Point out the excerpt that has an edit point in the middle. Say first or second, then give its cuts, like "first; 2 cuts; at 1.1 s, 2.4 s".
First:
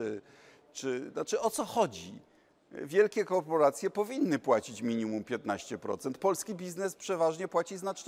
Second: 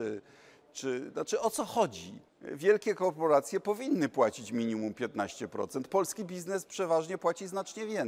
second; 1 cut; at 2.3 s